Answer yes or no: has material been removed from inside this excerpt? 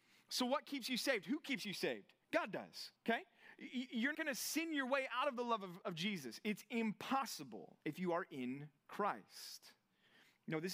yes